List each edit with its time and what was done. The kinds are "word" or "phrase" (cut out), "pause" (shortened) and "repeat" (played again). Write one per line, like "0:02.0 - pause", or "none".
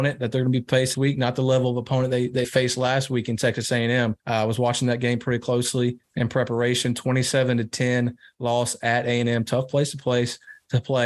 0:00.9 - word
0:02.4 - word
0:04.2 - pause
0:06.0 - pause